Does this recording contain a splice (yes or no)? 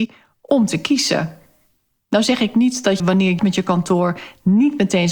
yes